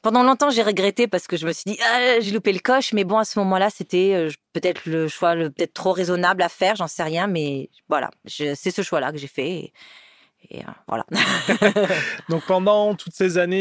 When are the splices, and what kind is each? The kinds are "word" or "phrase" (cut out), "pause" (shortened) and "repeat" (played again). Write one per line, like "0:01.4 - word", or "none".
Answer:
none